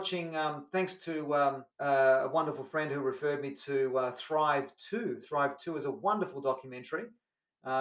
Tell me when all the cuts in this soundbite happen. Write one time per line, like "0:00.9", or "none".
0:01.7